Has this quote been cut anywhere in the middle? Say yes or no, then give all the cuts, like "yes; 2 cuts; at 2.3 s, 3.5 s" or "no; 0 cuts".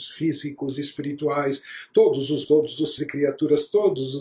yes; 2 cuts; at 2.4 s, 3.0 s